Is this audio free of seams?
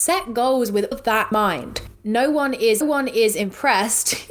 no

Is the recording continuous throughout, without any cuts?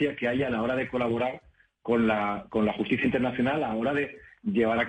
yes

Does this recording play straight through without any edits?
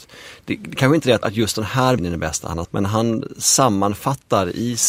no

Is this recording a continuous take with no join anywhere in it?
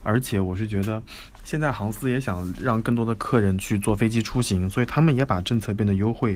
no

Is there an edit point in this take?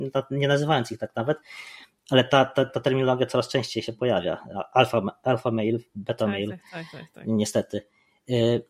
no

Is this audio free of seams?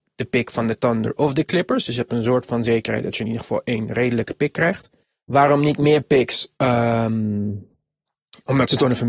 no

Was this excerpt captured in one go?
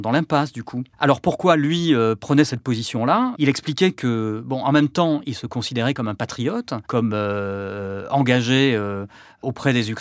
no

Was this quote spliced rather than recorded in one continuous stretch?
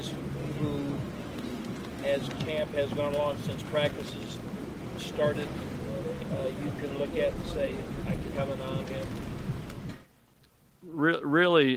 yes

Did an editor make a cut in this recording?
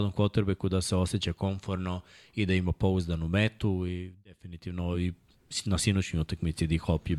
no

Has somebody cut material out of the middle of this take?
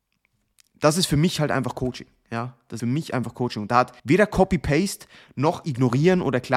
yes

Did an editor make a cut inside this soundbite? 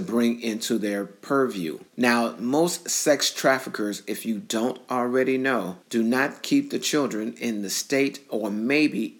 yes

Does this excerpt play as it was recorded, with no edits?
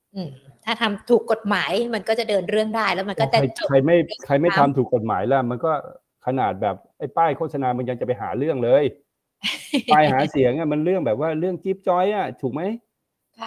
yes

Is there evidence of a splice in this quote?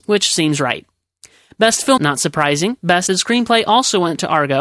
yes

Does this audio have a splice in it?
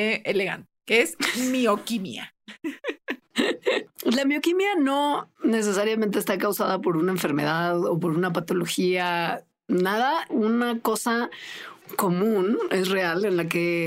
yes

